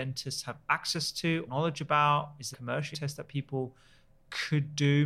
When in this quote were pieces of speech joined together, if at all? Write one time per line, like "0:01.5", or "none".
0:01.5
0:02.5
0:02.9